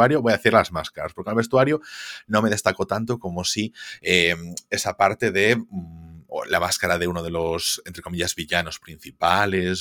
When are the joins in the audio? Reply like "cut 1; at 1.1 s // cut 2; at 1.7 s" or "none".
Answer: none